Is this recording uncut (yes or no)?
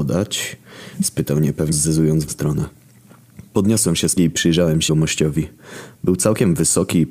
no